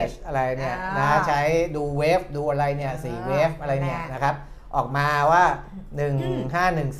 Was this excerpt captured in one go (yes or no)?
yes